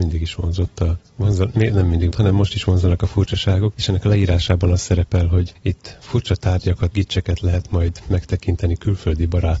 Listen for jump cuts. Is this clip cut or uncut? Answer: cut